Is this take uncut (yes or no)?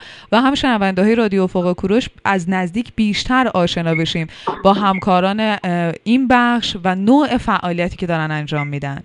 yes